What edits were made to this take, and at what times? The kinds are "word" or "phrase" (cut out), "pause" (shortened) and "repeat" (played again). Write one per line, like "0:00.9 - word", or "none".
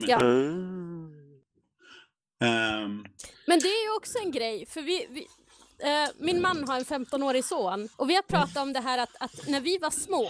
0:07.9 - pause